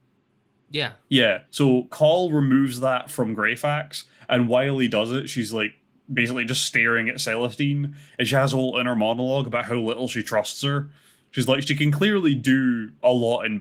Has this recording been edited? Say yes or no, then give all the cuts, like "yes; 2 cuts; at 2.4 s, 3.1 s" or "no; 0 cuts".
yes; 1 cut; at 1.4 s